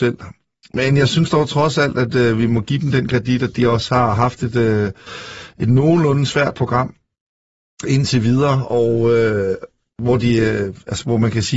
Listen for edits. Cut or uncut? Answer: uncut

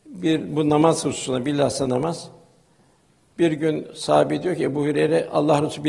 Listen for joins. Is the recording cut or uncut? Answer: uncut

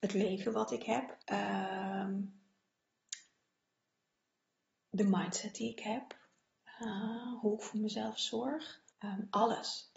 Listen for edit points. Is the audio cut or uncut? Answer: cut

